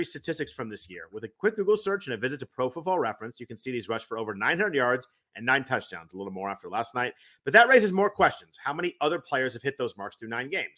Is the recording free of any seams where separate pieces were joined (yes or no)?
yes